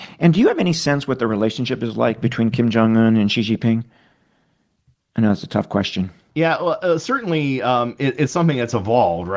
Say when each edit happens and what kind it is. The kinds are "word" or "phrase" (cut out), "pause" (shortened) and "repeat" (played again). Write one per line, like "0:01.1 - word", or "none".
none